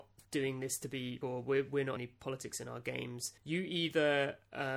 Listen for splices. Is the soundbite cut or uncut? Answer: cut